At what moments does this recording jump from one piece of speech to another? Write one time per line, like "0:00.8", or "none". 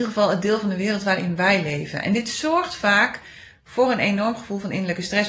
none